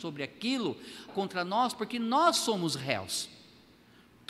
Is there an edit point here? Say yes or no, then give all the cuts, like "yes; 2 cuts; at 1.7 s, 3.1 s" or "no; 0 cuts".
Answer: yes; 1 cut; at 1.1 s